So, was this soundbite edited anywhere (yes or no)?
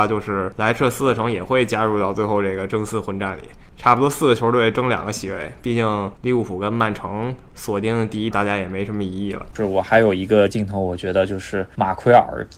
yes